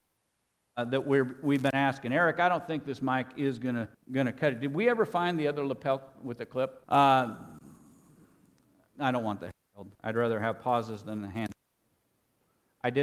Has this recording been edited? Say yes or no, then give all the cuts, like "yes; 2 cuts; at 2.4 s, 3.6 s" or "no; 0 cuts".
yes; 3 cuts; at 3.9 s, 6.8 s, 9.9 s